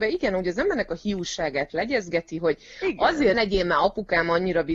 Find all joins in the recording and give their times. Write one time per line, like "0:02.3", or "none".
0:01.7
0:03.3